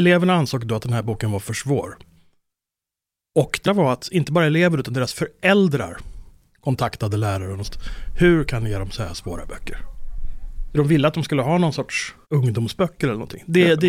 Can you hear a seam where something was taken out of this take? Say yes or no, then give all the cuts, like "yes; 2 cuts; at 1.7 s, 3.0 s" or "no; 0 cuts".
yes; 3 cuts; at 3.6 s, 7.6 s, 12.2 s